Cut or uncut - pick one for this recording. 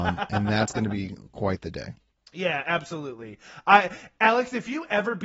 uncut